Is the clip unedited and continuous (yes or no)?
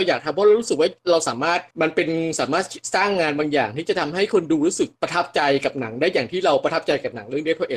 no